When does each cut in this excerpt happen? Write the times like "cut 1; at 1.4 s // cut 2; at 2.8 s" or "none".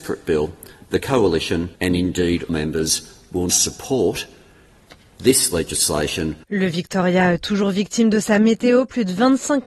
cut 1; at 1.8 s // cut 2; at 2.5 s // cut 3; at 3.5 s // cut 4; at 6.4 s

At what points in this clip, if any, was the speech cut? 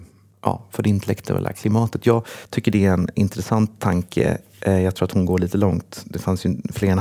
none

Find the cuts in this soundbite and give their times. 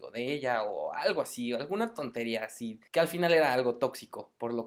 cut 1; at 2.9 s

